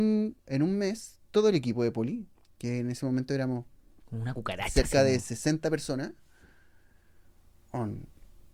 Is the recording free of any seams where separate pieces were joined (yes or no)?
yes